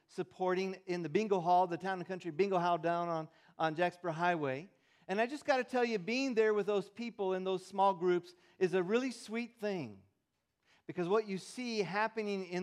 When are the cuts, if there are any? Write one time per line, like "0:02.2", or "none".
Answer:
none